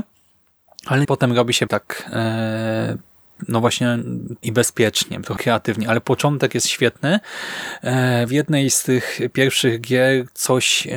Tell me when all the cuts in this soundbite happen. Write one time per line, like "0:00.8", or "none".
0:01.0
0:01.7
0:04.4
0:05.4
0:08.3

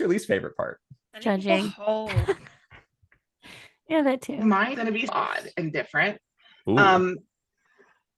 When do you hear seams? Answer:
0:04.7
0:05.1

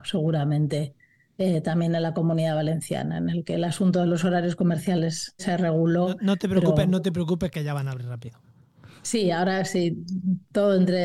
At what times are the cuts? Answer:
0:05.4

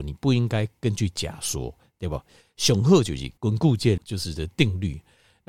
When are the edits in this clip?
0:03.4
0:04.0

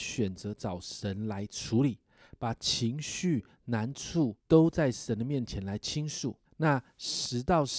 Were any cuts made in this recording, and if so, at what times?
0:04.4
0:06.4

